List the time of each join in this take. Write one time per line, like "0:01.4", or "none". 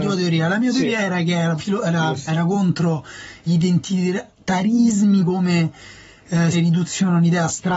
0:01.6
0:02.3
0:03.5
0:05.2
0:06.5